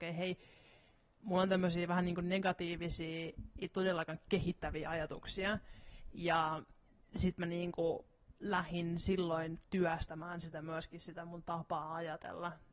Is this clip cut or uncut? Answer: uncut